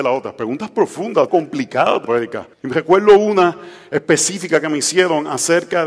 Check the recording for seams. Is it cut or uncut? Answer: cut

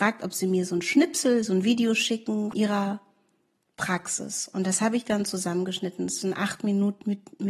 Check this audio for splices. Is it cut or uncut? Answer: cut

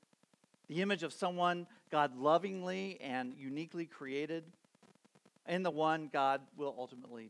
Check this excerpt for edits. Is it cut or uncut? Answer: uncut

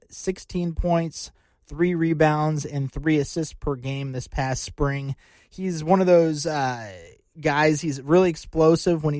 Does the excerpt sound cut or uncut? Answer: uncut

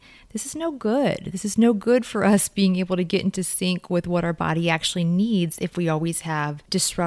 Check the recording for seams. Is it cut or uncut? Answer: uncut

